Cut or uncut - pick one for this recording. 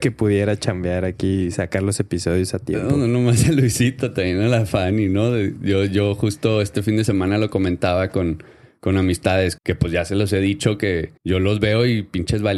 cut